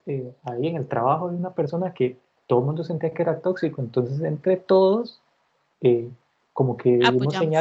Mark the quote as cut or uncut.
uncut